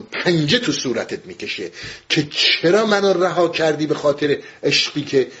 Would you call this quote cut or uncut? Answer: uncut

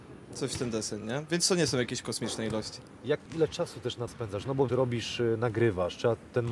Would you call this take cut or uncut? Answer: cut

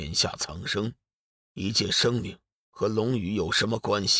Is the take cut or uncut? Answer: uncut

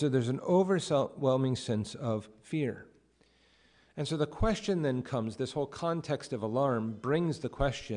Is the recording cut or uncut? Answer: uncut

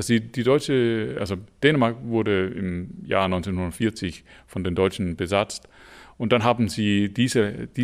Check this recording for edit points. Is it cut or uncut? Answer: uncut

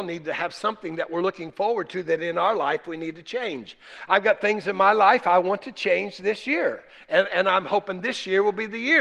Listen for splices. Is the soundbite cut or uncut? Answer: uncut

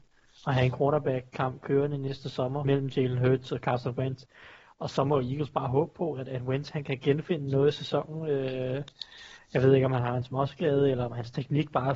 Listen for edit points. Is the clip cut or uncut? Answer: cut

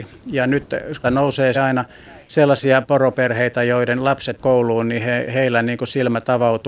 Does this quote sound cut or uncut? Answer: cut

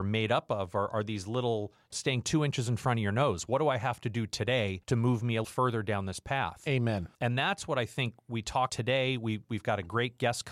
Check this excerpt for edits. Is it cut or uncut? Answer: cut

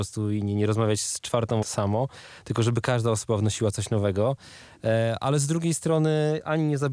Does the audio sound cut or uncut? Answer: cut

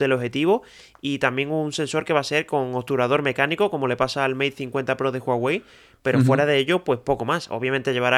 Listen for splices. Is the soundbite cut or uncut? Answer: uncut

